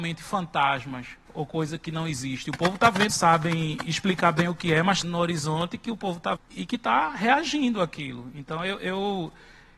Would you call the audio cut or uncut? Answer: cut